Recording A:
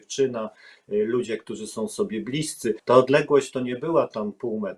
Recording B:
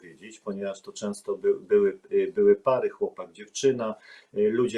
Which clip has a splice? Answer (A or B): A